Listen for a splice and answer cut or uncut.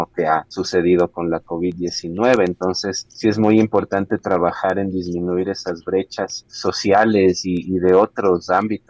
uncut